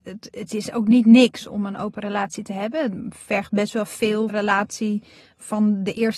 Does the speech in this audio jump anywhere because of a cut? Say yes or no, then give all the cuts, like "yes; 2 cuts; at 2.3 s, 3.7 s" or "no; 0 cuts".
yes; 1 cut; at 4.3 s